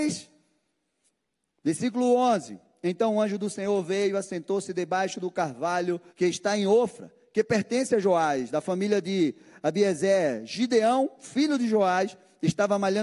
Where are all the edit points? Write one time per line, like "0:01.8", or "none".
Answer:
0:06.1

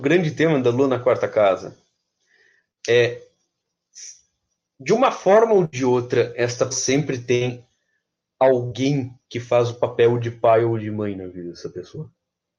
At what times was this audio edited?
0:06.7

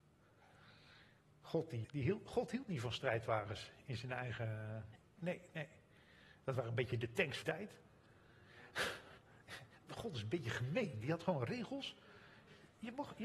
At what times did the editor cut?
0:01.8
0:05.0
0:07.4

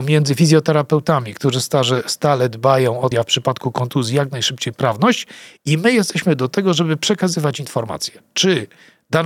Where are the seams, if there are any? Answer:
0:03.1
0:04.7

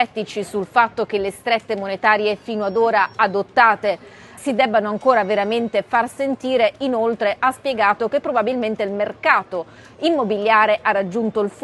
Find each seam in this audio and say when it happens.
0:04.4

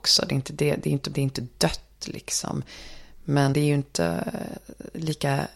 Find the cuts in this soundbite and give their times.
0:01.1
0:03.5

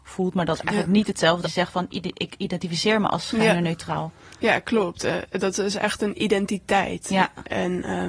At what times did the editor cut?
0:01.4

